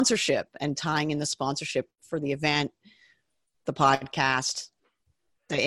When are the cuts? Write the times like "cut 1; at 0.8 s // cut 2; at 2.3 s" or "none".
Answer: none